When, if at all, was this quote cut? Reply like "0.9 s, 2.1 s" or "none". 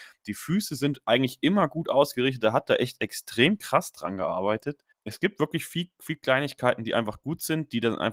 4.9 s